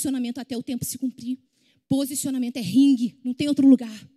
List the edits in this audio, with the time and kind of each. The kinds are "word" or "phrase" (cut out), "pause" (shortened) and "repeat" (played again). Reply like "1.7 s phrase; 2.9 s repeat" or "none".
none